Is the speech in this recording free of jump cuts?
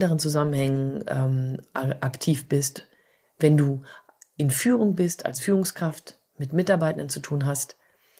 yes; 0 cuts

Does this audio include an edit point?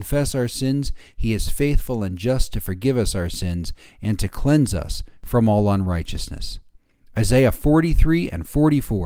no; 0 cuts

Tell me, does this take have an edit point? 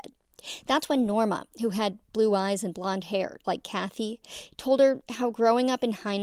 yes; 1 cut; at 3.4 s

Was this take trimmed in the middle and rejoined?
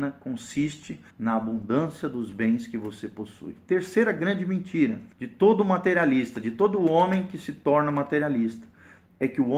yes; 2 cuts; at 1.1 s, 5.1 s

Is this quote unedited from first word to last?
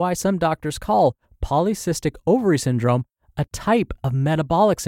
yes; 0 cuts

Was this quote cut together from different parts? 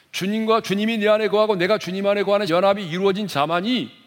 yes; 1 cut; at 2.5 s

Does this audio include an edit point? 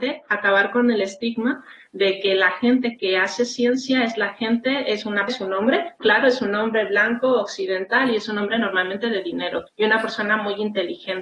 yes; 3 cuts; at 5.3 s, 6.0 s, 9.7 s

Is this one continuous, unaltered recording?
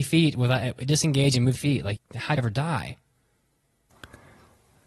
no; 3 cuts; at 1.6 s, 2.0 s, 2.4 s

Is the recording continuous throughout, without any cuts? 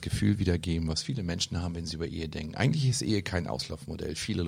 yes; 0 cuts

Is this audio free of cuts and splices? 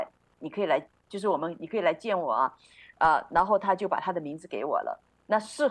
yes; 0 cuts

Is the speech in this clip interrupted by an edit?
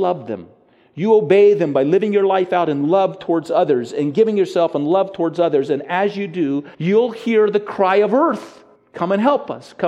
yes; 2 cuts; at 6.7 s, 8.8 s

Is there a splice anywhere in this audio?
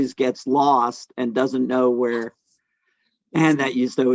no; 0 cuts

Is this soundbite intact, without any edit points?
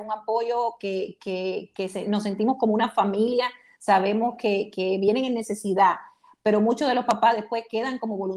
yes; 0 cuts

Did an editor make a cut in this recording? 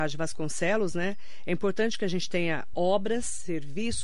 no; 0 cuts

